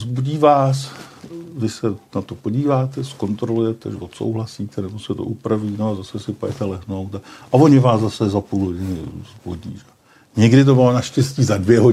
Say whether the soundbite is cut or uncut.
uncut